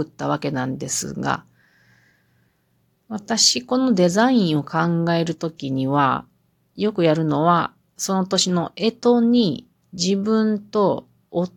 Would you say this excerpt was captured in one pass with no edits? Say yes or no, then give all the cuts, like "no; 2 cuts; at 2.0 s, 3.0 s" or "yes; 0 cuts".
yes; 0 cuts